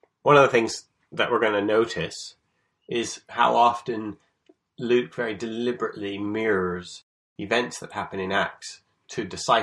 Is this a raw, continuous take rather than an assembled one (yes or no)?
yes